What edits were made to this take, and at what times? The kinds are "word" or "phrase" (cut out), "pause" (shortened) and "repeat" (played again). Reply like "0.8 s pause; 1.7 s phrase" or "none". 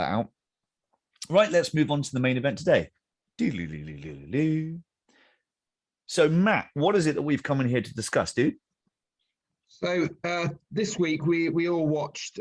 none